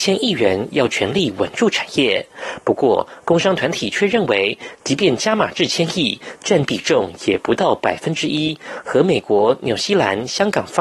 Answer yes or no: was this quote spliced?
yes